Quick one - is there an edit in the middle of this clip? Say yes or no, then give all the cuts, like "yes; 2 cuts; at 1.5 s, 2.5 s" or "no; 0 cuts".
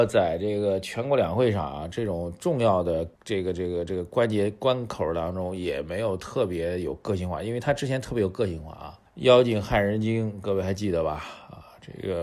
yes; 2 cuts; at 3.1 s, 9.1 s